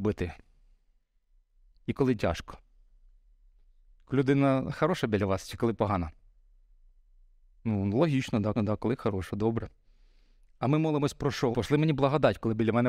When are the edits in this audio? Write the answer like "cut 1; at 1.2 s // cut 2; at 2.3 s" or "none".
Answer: cut 1; at 8.5 s // cut 2; at 11.5 s